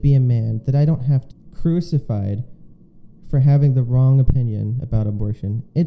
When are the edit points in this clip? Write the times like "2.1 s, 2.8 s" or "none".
1.3 s

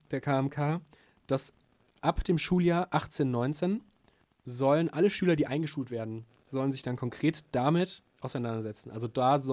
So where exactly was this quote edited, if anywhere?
none

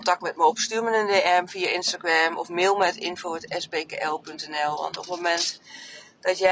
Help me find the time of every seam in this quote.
none

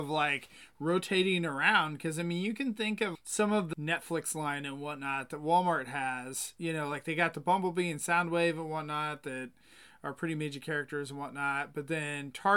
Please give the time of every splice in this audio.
3.1 s, 3.7 s

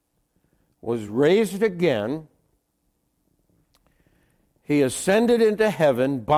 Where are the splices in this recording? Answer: none

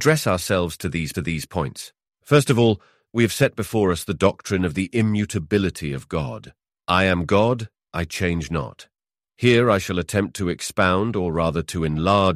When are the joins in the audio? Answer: 1.1 s

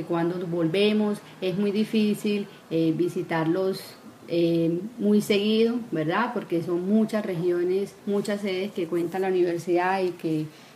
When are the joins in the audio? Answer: 8.0 s

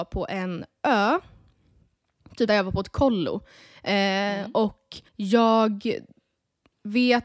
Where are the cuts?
2.5 s, 5.1 s

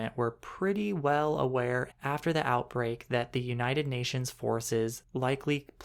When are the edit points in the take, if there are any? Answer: 1.9 s

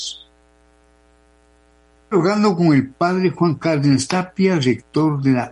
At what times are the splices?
none

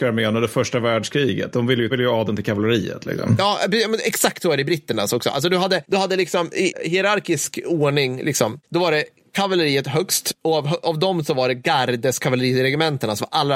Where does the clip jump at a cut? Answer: 1.9 s

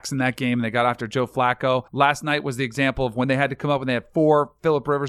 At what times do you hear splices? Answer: 1.9 s

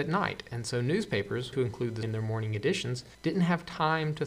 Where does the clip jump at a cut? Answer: 1.5 s, 2.0 s, 3.1 s

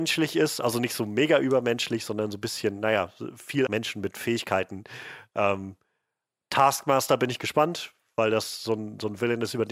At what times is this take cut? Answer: 3.7 s

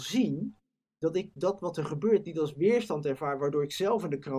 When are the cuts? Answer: none

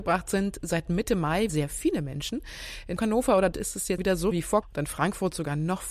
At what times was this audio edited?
1.5 s, 3.0 s, 3.5 s, 4.0 s, 4.3 s, 4.6 s

